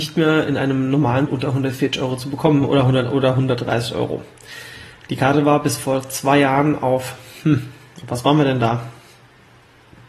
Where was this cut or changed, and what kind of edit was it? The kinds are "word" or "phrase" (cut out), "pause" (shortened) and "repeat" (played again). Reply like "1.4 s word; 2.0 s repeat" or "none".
1.3 s word